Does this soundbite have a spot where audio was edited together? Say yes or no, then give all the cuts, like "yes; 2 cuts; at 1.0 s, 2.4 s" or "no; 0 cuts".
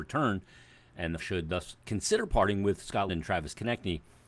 yes; 2 cuts; at 1.2 s, 3.1 s